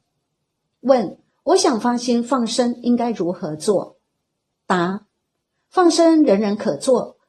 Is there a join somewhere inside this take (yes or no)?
no